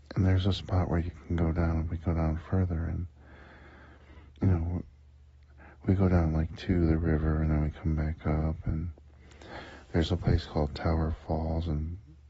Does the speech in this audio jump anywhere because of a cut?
yes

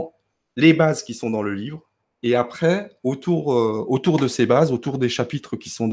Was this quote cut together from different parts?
no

